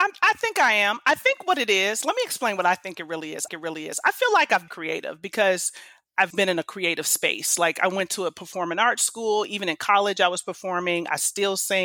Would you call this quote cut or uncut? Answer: cut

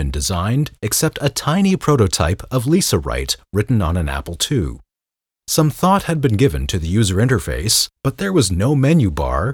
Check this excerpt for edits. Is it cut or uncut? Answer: uncut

